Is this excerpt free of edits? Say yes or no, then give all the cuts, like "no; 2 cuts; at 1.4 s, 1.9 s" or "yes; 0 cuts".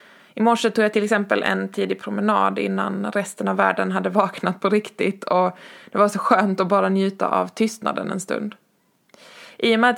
yes; 0 cuts